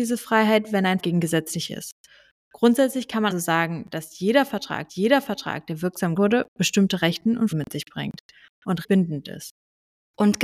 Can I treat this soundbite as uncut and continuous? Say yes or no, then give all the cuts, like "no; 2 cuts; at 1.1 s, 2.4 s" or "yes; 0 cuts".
no; 7 cuts; at 1.0 s, 1.7 s, 3.3 s, 4.9 s, 6.2 s, 7.5 s, 8.8 s